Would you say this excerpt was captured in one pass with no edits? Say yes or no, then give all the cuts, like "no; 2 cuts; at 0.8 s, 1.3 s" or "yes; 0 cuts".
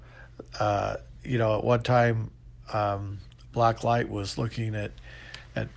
yes; 0 cuts